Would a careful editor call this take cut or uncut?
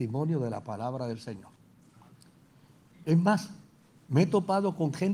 uncut